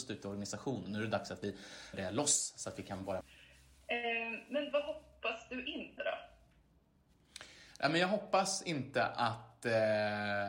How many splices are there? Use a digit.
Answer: 3